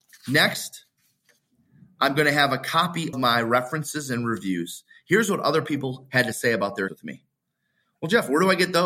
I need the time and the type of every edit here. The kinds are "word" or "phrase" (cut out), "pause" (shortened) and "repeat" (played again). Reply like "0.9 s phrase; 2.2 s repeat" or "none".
3.1 s word; 6.9 s word